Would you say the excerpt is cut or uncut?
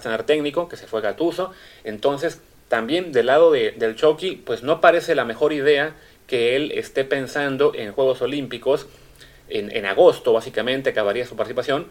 cut